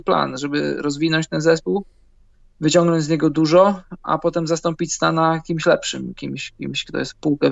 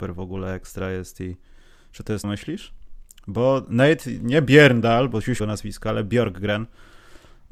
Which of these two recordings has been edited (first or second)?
second